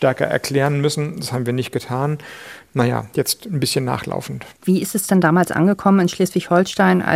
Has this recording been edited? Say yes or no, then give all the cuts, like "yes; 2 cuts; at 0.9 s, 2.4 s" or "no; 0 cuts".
yes; 1 cut; at 4.6 s